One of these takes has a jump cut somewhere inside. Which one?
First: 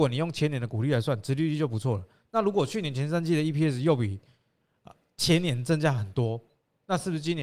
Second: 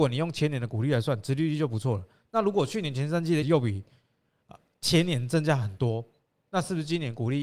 second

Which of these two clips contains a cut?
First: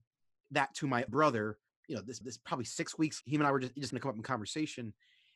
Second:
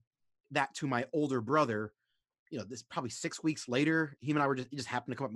first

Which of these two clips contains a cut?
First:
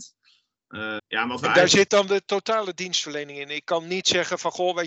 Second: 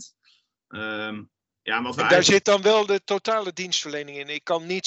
first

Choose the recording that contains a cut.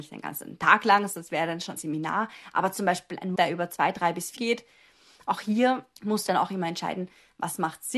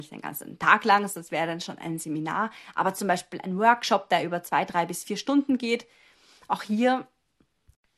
first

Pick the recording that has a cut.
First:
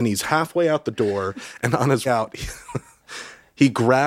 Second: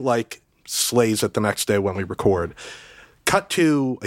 first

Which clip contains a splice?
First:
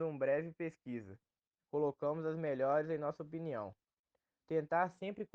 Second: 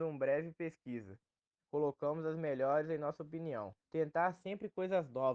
second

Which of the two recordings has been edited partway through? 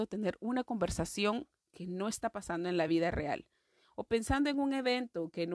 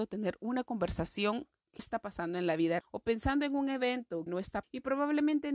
second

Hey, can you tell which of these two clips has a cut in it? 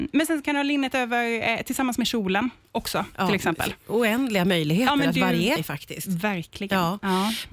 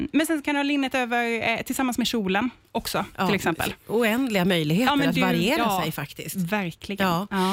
first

